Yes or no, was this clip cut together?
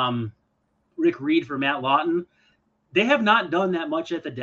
no